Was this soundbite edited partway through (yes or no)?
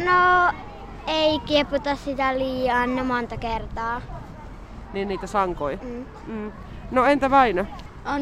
no